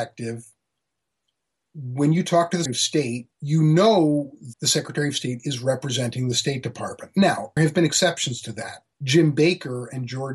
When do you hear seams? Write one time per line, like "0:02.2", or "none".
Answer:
0:02.7
0:03.3
0:04.5
0:07.6
0:08.9